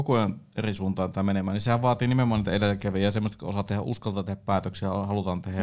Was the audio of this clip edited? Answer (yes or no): no